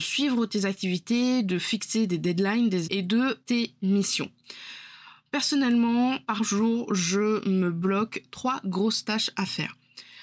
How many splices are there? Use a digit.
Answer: 3